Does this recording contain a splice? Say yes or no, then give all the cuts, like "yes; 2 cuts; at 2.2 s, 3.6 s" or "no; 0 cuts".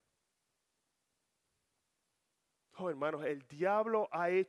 no; 0 cuts